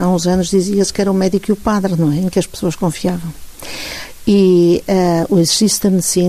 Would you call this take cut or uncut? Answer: uncut